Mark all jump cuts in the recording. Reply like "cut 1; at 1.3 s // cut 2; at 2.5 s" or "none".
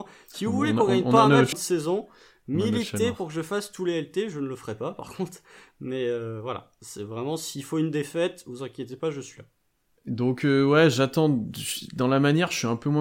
cut 1; at 1.5 s